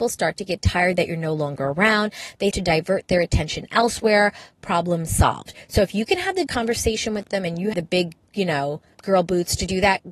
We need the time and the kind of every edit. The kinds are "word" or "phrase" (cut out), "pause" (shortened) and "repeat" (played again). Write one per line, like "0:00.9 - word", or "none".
0:02.5 - word
0:06.5 - word
0:07.7 - word
0:08.9 - word